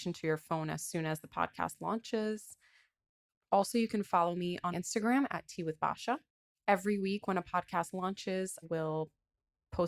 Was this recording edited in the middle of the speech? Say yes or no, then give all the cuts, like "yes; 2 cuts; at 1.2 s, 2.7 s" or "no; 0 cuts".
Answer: yes; 2 cuts; at 4.7 s, 8.6 s